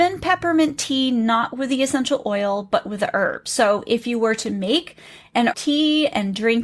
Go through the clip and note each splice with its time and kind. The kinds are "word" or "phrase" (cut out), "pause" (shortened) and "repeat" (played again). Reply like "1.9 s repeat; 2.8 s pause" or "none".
5.5 s word